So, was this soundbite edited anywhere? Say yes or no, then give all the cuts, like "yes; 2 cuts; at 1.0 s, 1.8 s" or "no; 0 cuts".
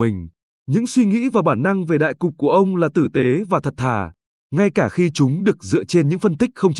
no; 0 cuts